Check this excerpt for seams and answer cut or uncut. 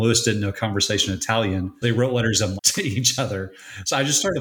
cut